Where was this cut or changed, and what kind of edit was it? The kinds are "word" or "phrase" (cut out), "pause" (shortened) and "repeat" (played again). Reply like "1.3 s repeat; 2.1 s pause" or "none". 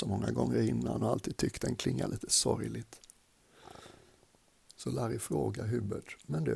4.5 s pause